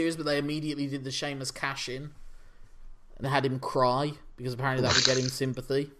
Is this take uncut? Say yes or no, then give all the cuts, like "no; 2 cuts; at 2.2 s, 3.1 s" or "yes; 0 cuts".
no; 1 cut; at 3.2 s